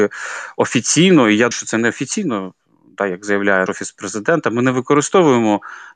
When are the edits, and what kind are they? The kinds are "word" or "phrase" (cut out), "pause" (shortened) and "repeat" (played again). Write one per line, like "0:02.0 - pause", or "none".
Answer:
0:01.5 - word
0:03.7 - word